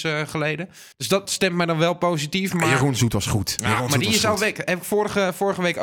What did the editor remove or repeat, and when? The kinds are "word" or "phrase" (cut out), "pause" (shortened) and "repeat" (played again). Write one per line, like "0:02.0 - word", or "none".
0:00.9 - pause
0:01.3 - word